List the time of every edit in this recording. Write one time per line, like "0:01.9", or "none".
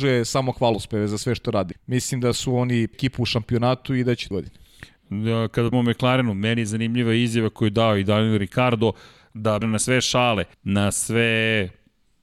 0:01.7
0:02.9
0:04.3
0:05.7
0:09.6
0:10.5